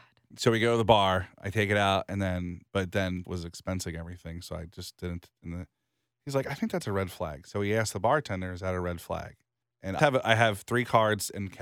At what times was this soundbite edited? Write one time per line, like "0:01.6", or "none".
0:03.2
0:09.6
0:10.0